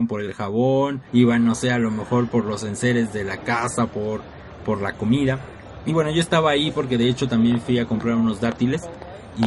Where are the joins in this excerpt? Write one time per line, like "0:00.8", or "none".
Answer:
0:01.1